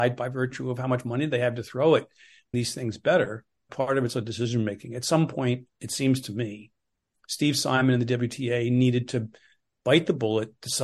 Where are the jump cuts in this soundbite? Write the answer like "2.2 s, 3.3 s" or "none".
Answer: 2.5 s, 3.7 s, 4.1 s